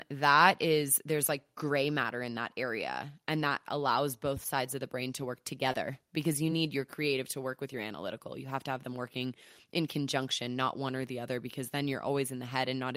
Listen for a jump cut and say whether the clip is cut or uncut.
uncut